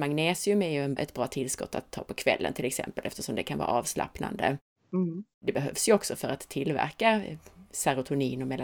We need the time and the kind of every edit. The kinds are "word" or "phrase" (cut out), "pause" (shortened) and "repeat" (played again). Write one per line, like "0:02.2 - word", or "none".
0:01.0 - word
0:05.3 - pause

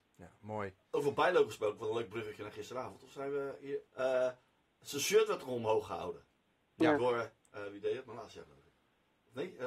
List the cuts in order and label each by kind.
0:03.9 - pause

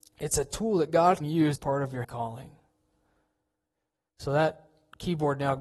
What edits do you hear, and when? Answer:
0:01.2 - word
0:01.5 - word
0:02.0 - word

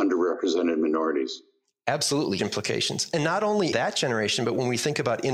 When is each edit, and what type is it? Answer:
0:02.4 - word
0:03.7 - word

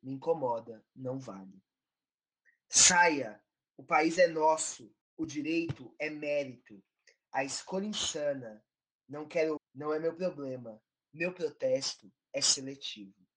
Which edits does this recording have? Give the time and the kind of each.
0:05.0 - pause
0:09.6 - word

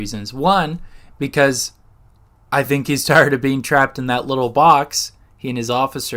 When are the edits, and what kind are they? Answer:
none

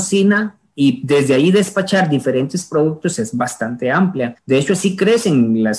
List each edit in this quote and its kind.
0:04.4 - pause

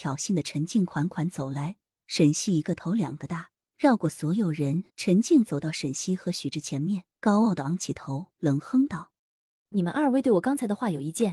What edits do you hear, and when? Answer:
0:03.7 - pause
0:04.9 - pause
0:07.1 - pause
0:09.2 - pause

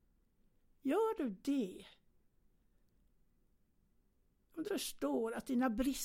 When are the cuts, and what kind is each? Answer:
0:04.6 - word

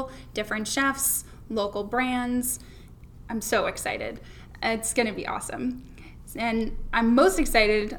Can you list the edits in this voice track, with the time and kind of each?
none

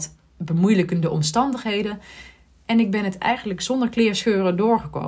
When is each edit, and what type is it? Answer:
none

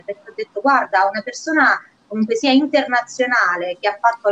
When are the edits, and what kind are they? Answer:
none

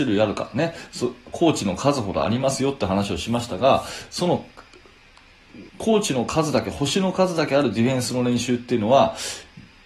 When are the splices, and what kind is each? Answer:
0:05.7 - pause

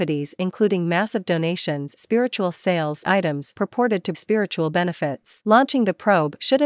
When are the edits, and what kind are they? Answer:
0:01.9 - word
0:03.0 - word
0:04.1 - word

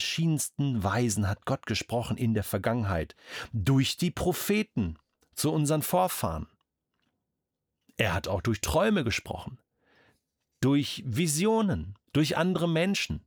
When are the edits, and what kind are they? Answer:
0:12.1 - pause

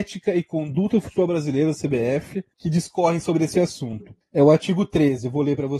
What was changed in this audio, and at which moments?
0:02.5 - pause
0:04.2 - pause

